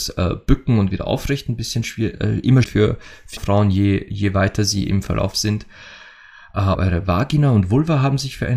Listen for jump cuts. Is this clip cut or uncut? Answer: cut